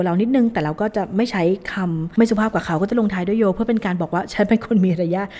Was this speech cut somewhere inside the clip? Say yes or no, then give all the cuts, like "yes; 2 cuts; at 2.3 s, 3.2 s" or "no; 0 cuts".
no; 0 cuts